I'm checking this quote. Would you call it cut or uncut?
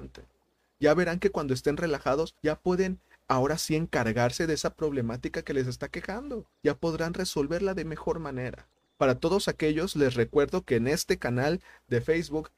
cut